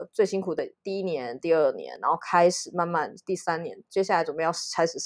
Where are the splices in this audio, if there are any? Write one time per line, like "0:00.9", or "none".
none